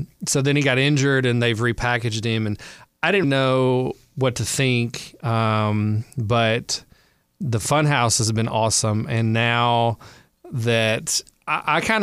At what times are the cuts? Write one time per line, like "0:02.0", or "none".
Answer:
0:03.2